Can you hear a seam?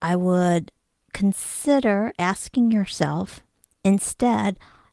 no; 0 cuts

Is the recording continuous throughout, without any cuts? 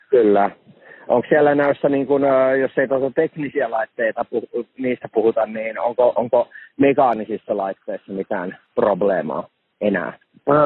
yes; 0 cuts

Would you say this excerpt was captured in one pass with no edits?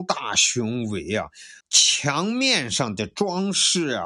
no; 1 cut; at 1.6 s

